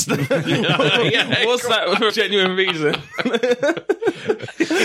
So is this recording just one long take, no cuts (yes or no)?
no